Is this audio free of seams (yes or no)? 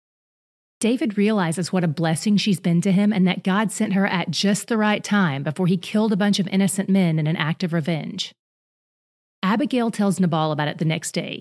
yes